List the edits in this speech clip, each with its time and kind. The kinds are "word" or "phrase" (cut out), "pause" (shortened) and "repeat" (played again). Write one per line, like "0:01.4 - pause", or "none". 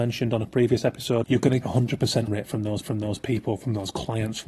0:01.2 - phrase
0:01.6 - word
0:02.3 - word
0:02.8 - repeat